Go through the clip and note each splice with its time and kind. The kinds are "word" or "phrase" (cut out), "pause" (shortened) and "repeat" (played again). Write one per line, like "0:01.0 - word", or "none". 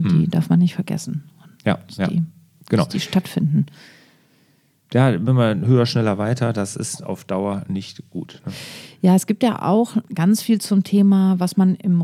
none